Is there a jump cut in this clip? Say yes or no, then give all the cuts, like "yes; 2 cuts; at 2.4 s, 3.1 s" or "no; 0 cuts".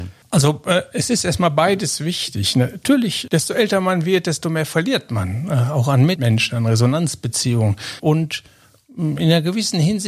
no; 0 cuts